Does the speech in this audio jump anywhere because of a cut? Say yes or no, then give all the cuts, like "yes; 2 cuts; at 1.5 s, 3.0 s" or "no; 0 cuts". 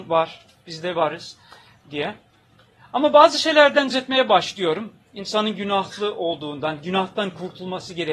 yes; 1 cut; at 3.9 s